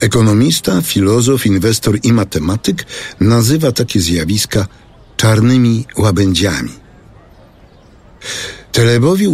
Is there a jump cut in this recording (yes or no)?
no